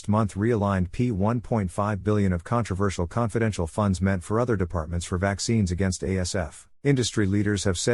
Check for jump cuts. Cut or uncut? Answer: cut